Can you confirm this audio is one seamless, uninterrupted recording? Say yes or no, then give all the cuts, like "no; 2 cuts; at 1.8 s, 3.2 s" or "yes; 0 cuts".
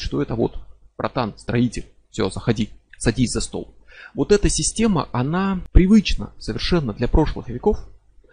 yes; 0 cuts